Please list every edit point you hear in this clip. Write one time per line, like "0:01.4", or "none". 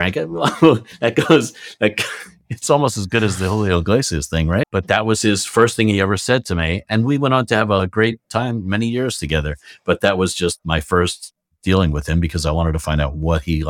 none